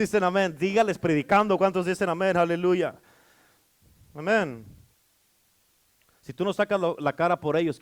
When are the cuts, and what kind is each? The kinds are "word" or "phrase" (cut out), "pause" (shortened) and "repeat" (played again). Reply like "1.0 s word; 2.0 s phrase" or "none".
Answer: none